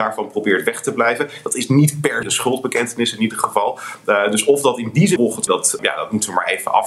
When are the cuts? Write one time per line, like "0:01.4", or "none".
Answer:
0:02.2
0:05.2
0:05.5
0:05.8